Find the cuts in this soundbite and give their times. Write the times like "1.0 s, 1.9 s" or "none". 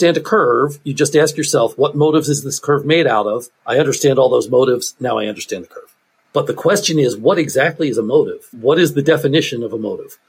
3.5 s, 6.2 s